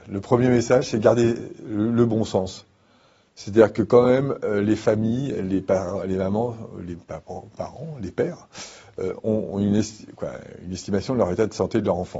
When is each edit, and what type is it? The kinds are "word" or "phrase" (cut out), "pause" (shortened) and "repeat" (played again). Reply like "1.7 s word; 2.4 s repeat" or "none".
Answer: none